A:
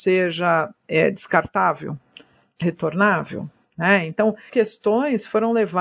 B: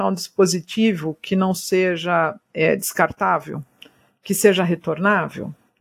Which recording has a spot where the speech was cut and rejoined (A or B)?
A